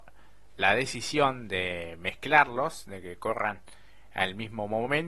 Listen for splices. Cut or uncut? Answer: uncut